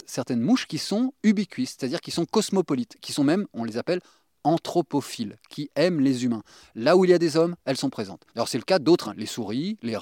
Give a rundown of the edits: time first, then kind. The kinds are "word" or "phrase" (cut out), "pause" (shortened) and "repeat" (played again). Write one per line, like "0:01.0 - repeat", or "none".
0:08.3 - pause
0:09.0 - word